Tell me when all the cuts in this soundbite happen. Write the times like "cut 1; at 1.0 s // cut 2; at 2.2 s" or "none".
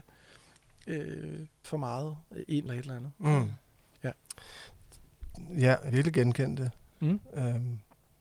cut 1; at 1.6 s // cut 2; at 2.7 s // cut 3; at 5.9 s